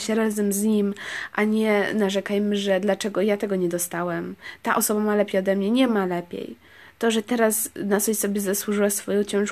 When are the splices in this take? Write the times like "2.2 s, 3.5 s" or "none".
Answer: none